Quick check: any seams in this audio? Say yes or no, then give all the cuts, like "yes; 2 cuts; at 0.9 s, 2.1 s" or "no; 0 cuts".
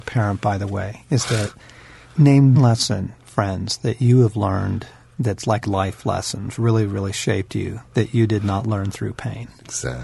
yes; 2 cuts; at 2.5 s, 5.6 s